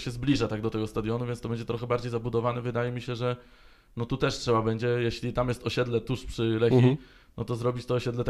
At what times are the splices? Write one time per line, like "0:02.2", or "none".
none

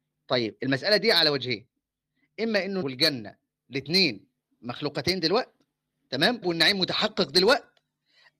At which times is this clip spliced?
0:02.8
0:06.4

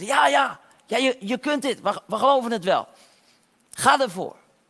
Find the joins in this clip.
none

